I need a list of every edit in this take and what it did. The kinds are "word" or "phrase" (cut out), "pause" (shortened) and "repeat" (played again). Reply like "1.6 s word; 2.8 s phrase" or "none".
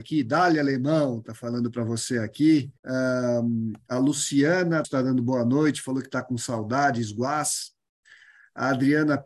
2.8 s pause; 4.8 s word